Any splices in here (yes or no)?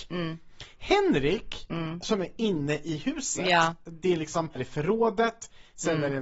yes